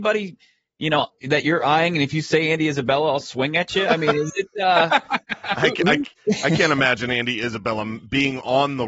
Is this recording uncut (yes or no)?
no